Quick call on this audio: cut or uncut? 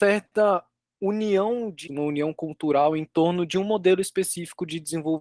cut